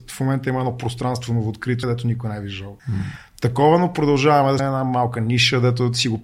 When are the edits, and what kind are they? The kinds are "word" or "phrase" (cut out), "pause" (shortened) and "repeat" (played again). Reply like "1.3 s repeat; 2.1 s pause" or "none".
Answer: 1.8 s phrase; 2.8 s pause; 4.6 s word